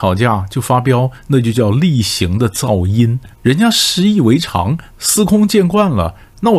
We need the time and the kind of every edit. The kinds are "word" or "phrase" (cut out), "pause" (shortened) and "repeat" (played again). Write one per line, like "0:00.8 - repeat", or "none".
0:03.3 - pause